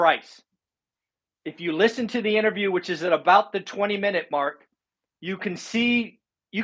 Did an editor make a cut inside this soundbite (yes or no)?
no